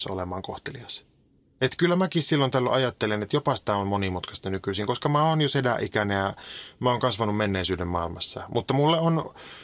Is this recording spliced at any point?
no; 0 cuts

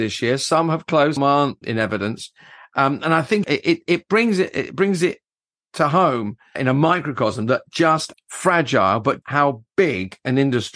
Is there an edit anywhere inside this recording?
yes; 6 cuts; at 1.2 s, 1.6 s, 3.4 s, 6.6 s, 8.1 s, 9.2 s

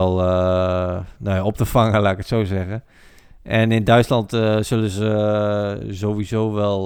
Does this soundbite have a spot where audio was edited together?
no; 0 cuts

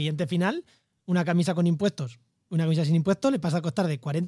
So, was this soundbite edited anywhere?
no; 0 cuts

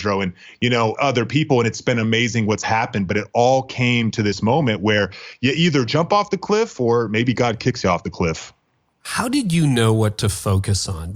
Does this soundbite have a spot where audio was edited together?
yes; 1 cut; at 0.9 s

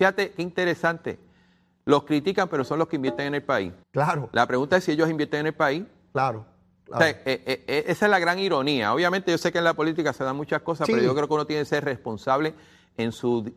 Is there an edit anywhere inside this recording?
yes; 1 cut; at 3.8 s

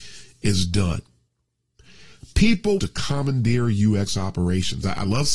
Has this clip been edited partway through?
yes; 1 cut; at 2.8 s

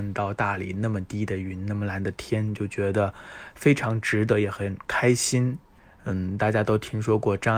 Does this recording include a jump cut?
no; 0 cuts

